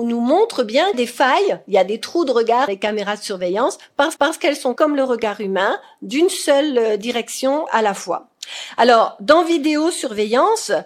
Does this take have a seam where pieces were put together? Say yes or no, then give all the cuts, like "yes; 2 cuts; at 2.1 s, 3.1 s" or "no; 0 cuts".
yes; 5 cuts; at 0.9 s, 2.7 s, 4.2 s, 4.8 s, 7.7 s